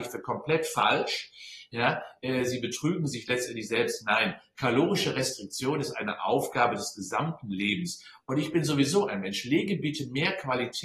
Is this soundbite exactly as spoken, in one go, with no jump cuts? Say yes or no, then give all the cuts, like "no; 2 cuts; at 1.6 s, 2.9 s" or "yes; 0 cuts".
yes; 0 cuts